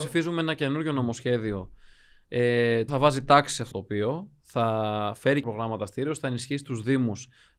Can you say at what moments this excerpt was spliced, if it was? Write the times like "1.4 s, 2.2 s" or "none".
2.9 s, 3.7 s, 5.4 s